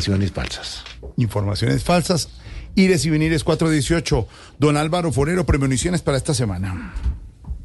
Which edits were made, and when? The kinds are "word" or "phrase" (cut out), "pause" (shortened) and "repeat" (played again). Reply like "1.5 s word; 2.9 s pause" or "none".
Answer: none